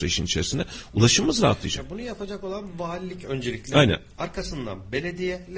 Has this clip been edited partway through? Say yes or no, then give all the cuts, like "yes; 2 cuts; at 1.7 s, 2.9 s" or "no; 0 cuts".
no; 0 cuts